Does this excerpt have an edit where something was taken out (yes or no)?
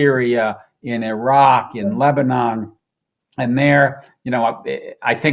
no